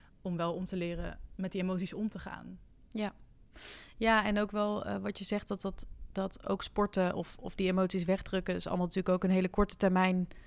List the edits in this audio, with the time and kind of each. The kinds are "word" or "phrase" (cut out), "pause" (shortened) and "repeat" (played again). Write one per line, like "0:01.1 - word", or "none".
none